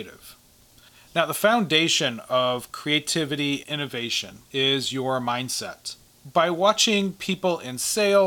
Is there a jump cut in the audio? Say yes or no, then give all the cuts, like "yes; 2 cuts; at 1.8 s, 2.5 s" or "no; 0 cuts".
yes; 2 cuts; at 3.6 s, 4.4 s